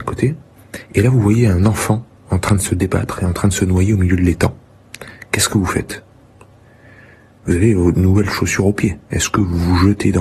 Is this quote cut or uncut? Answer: cut